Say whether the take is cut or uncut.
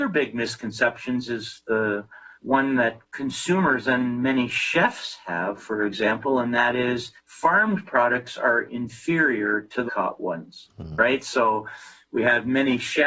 cut